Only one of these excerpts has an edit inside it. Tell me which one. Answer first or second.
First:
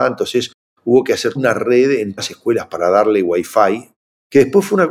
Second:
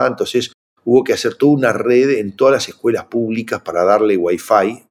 first